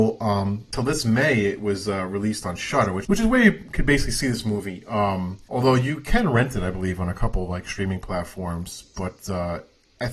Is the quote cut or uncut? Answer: uncut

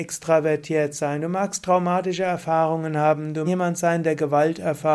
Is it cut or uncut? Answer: cut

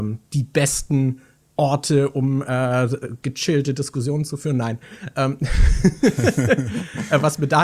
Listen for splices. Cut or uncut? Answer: uncut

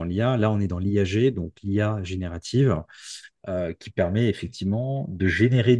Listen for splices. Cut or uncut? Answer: uncut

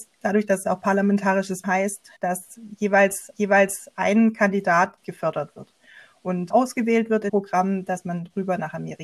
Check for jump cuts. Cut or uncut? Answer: cut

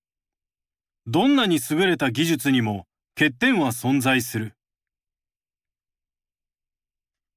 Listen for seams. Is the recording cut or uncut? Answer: uncut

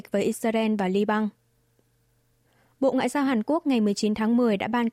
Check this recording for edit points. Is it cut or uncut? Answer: uncut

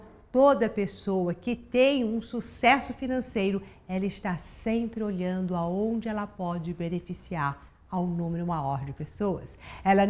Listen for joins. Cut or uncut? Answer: uncut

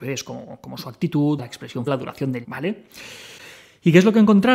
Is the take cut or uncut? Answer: cut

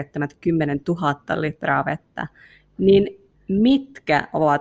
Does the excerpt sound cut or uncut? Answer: uncut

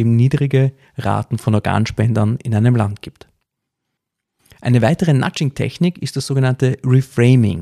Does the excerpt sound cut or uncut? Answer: uncut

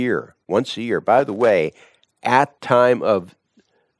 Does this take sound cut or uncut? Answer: cut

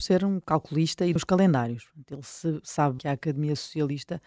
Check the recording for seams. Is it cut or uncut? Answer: cut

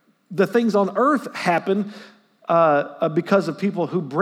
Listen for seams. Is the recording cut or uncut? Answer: uncut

